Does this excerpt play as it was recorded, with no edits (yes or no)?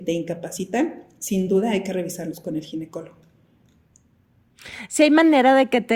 yes